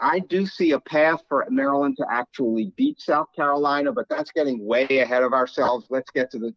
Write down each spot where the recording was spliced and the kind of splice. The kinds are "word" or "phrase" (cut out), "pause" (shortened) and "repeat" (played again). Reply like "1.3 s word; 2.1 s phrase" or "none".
none